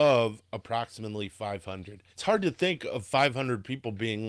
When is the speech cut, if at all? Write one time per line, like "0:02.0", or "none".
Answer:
0:02.1